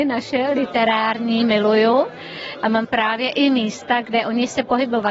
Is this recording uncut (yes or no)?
no